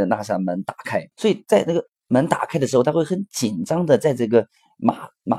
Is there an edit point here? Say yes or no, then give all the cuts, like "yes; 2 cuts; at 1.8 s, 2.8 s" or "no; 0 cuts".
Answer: yes; 1 cut; at 1.1 s